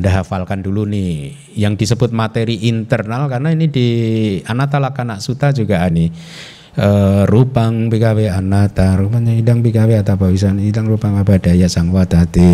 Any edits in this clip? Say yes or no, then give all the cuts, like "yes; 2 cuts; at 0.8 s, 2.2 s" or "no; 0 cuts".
yes; 1 cut; at 5.9 s